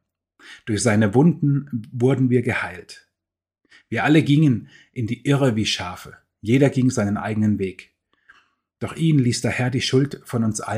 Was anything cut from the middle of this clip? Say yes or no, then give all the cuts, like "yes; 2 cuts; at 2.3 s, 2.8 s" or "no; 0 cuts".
no; 0 cuts